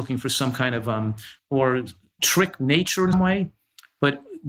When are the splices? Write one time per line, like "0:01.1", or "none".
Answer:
0:01.4
0:02.2
0:03.1